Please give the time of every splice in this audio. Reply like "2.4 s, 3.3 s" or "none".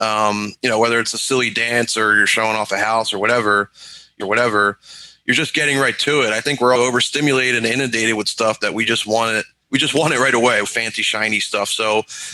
4.2 s, 6.8 s, 9.6 s, 10.6 s

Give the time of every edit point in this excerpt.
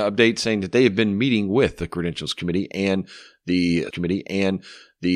3.9 s

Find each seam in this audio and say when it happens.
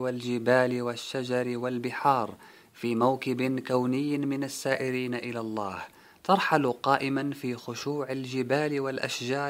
none

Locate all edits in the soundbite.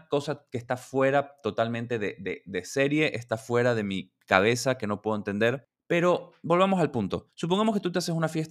7.3 s

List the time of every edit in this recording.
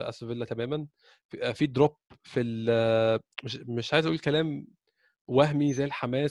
3.6 s

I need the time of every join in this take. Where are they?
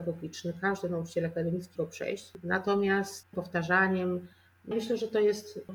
1.8 s, 3.3 s, 4.7 s

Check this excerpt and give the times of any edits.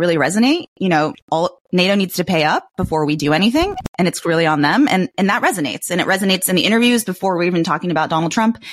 1.2 s

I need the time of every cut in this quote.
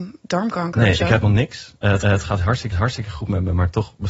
1.2 s, 2.0 s, 2.7 s

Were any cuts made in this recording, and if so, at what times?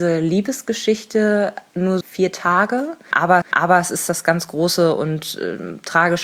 2.0 s, 3.4 s

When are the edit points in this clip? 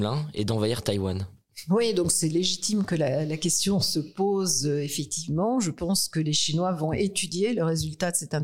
none

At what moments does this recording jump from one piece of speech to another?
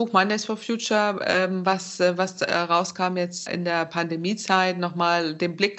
3.5 s

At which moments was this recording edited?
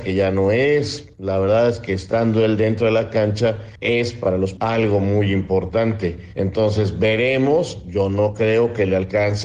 4.6 s

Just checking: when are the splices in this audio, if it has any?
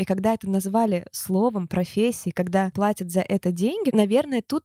2.7 s

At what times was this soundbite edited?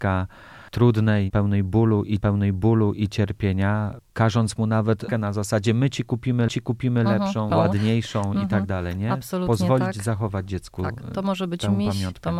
2.2 s, 5.1 s, 6.5 s, 7.5 s

